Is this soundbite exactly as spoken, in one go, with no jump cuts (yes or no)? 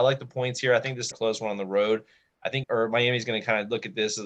no